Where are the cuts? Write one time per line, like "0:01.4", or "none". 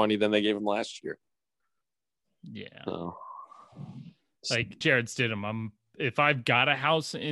0:04.8